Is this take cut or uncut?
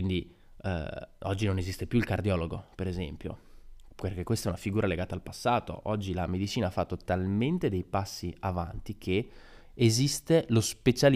uncut